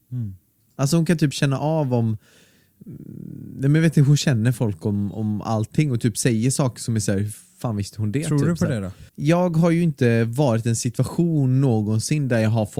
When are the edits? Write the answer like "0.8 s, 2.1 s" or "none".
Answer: 9.1 s